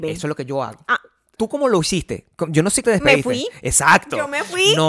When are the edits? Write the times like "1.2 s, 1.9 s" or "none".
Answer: 1.4 s, 2.8 s